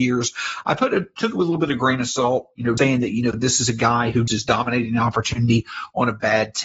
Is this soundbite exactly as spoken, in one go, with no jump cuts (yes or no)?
no